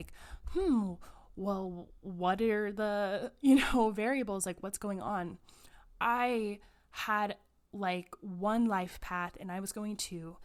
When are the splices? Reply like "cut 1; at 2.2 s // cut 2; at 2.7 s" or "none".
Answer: none